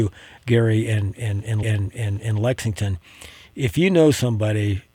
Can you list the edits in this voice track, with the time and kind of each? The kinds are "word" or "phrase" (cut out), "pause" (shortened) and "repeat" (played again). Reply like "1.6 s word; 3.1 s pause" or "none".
1.6 s repeat